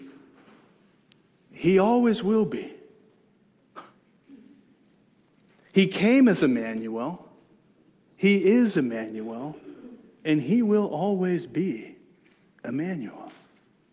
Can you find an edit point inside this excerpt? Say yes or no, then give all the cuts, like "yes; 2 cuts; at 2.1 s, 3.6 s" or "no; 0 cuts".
no; 0 cuts